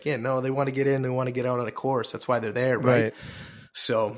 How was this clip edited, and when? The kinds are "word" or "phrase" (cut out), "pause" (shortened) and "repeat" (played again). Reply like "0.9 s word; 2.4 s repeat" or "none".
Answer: none